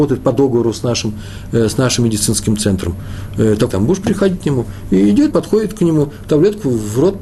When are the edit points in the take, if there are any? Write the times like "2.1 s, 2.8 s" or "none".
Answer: 3.7 s, 5.3 s